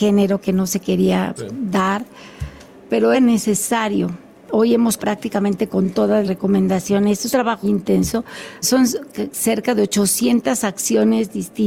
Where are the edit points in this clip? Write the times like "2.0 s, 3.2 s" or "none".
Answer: 1.4 s, 3.1 s, 5.0 s, 6.2 s, 7.3 s, 7.6 s, 8.6 s